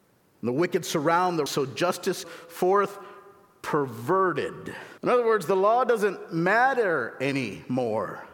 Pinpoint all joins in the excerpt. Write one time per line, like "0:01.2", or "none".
0:01.5
0:02.2
0:05.0